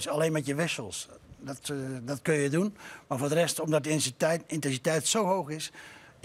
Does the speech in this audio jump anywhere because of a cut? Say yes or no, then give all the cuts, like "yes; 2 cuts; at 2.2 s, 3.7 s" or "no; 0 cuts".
no; 0 cuts